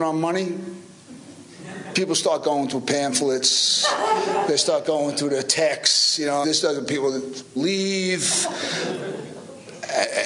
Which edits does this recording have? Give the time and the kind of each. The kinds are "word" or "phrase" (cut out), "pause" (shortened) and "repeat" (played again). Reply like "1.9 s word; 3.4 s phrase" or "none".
6.4 s word; 7.6 s word